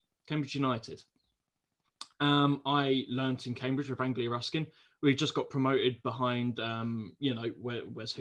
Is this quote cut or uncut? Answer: uncut